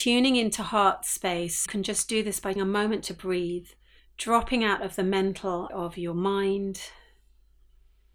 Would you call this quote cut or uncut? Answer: cut